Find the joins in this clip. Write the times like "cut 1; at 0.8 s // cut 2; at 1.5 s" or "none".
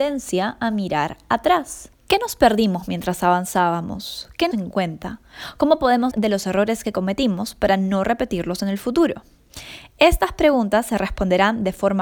cut 1; at 4.5 s // cut 2; at 6.1 s